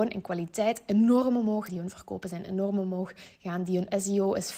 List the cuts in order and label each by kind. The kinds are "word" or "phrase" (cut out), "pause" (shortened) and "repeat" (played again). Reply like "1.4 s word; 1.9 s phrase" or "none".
1.7 s word